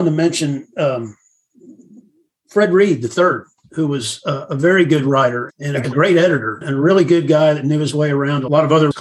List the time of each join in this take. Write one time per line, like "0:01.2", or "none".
0:05.5